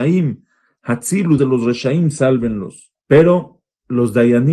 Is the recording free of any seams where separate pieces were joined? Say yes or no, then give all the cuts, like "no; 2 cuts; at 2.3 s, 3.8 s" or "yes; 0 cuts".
no; 2 cuts; at 1.4 s, 3.0 s